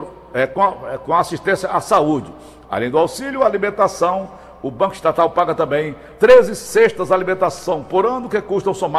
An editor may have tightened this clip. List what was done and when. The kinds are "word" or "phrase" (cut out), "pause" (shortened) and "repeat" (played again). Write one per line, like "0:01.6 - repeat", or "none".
0:06.1 - pause